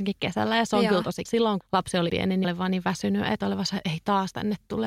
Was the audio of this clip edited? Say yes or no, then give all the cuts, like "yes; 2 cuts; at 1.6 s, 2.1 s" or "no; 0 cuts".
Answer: yes; 5 cuts; at 1.3 s, 1.6 s, 2.1 s, 2.4 s, 3.4 s